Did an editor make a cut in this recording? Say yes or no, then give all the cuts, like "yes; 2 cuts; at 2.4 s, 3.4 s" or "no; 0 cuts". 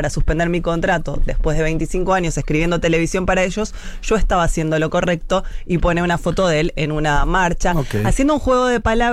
no; 0 cuts